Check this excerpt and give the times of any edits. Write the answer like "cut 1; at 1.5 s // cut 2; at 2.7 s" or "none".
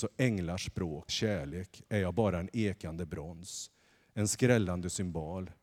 cut 1; at 1.1 s